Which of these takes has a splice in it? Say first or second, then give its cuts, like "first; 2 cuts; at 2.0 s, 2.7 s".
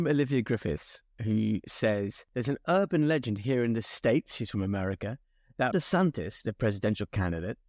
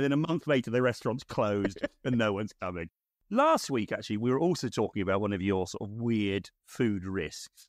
first; 2 cuts; at 2.3 s, 5.7 s